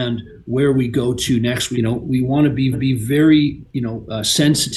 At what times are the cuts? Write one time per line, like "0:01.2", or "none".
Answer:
0:01.7
0:02.7